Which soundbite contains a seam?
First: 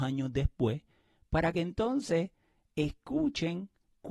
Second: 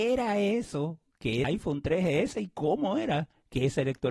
second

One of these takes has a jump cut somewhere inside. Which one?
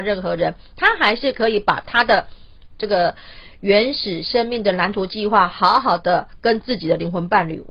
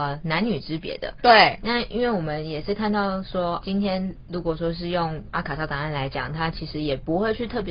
second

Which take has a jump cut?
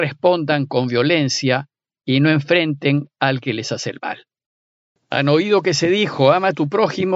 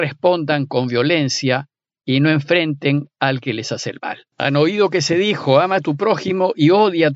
second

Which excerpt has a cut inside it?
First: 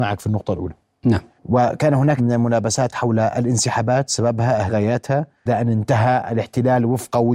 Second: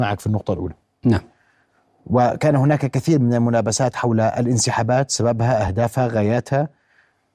first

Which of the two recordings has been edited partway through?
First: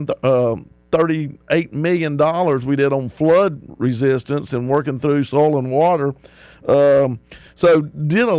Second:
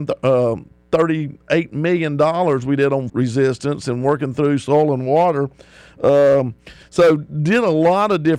second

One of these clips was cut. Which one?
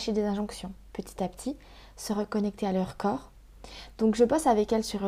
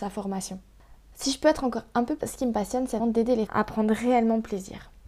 second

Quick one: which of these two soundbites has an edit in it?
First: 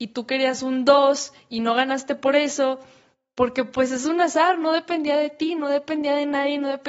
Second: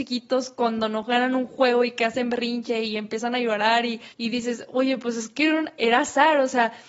second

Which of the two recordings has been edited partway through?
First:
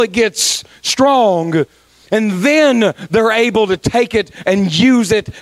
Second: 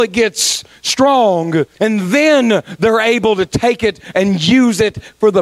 second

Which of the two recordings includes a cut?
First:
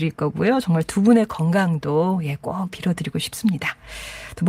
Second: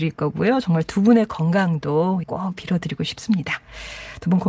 second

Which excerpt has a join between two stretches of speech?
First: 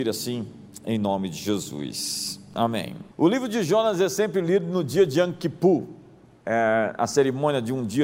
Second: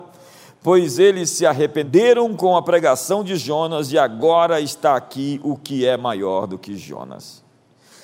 first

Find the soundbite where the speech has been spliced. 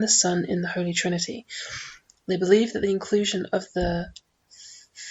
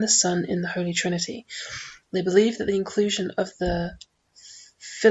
second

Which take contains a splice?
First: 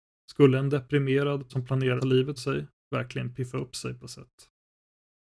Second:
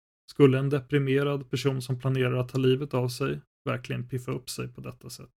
first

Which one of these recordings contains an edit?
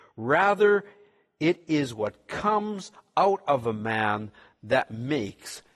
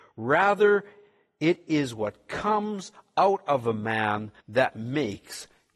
second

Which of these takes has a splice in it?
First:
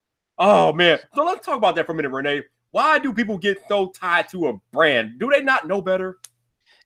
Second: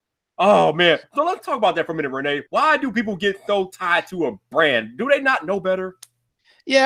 second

